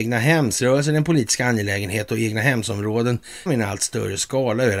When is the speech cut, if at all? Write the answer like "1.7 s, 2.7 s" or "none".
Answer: 3.5 s